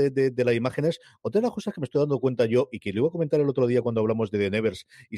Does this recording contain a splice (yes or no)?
no